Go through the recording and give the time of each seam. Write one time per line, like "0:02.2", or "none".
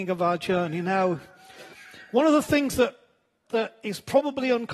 none

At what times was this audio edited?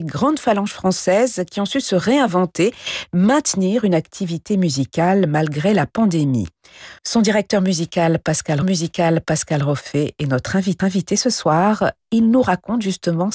0:07.0
0:08.6
0:10.8

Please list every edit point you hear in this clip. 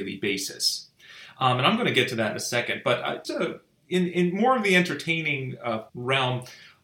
0:03.2
0:05.9

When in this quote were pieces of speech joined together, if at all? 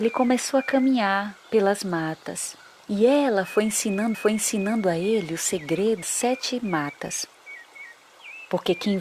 0:01.5
0:02.8
0:04.1
0:06.0

